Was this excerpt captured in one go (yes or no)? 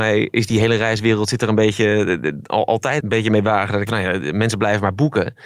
no